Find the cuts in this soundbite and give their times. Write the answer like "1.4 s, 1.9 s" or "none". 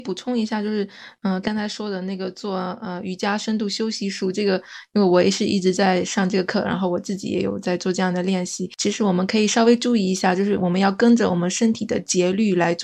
1.4 s